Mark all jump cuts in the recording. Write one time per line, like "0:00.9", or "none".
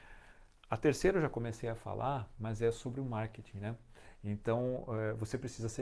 none